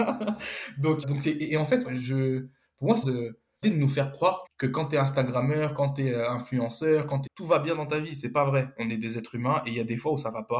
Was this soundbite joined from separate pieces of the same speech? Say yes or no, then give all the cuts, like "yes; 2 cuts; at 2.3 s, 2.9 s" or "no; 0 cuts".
yes; 6 cuts; at 1.0 s, 1.8 s, 3.0 s, 3.6 s, 4.5 s, 7.3 s